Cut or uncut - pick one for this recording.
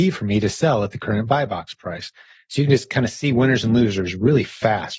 uncut